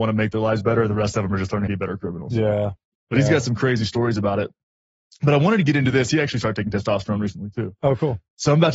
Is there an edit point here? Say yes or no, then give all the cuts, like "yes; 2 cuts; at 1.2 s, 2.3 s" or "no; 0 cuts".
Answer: yes; 1 cut; at 1.7 s